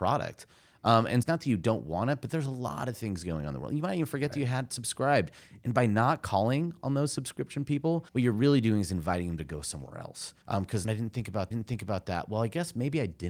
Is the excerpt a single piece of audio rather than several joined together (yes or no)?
no